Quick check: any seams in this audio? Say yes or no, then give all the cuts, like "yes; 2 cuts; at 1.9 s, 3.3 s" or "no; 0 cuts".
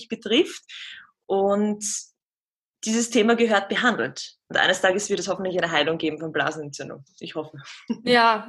no; 0 cuts